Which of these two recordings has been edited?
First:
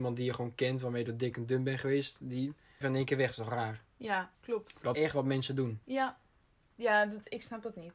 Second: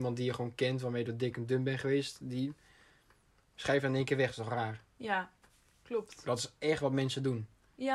first; 4 cuts; at 2.8 s, 4.3 s, 4.9 s, 5.8 s

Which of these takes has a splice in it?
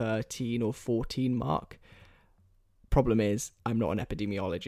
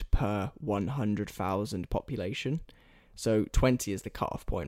first; 1 cut; at 3.6 s

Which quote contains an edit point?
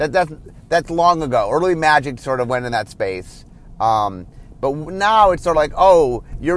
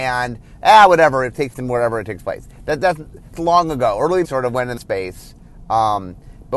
second; 4 cuts; at 1.5 s, 3.3 s, 4.2 s, 4.8 s

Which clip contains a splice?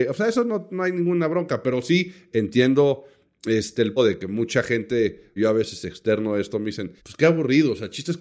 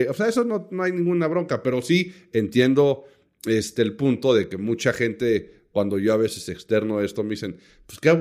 first; 3 cuts; at 4.0 s, 5.4 s, 7.0 s

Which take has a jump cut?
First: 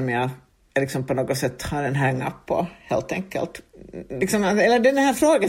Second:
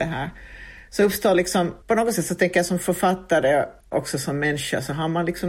second; 2 cuts; at 1.8 s, 3.8 s

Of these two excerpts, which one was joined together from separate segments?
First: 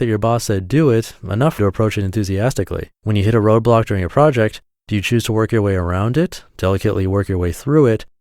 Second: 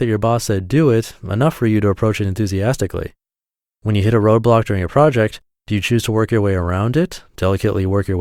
first; 2 cuts; at 1.6 s, 3.0 s

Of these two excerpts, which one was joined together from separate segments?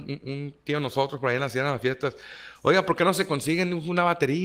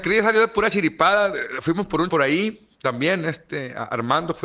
second; 1 cut; at 2.1 s

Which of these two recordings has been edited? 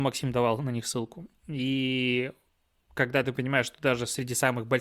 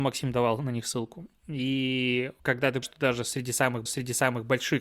second; 3 cuts; at 2.4 s, 2.8 s, 3.9 s

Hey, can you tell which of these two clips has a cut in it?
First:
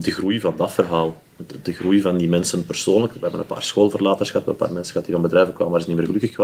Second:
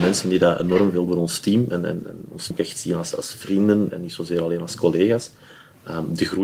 second; 5 cuts; at 1.1 s, 2.0 s, 2.5 s, 3.1 s, 3.9 s

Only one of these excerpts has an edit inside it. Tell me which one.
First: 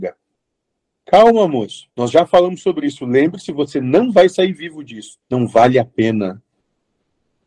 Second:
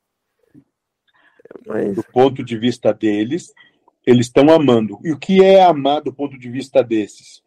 first; 2 cuts; at 1.9 s, 5.2 s

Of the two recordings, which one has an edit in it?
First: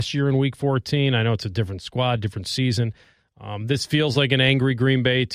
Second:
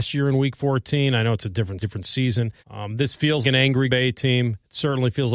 second; 4 cuts; at 1.8 s, 2.6 s, 3.4 s, 3.9 s

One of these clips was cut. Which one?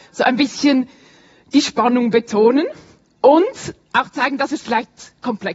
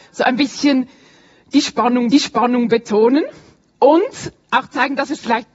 second; 1 cut; at 2.1 s

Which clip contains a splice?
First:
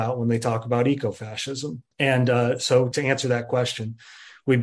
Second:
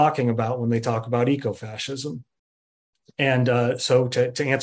first; 2 cuts; at 1.9 s, 2.9 s

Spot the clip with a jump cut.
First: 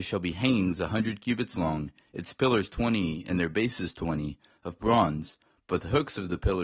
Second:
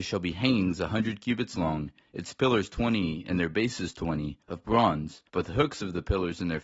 second; 2 cuts; at 4.4 s, 5.3 s

